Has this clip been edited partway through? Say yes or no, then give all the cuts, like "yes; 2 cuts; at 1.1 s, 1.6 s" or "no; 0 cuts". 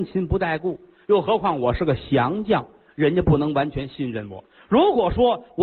no; 0 cuts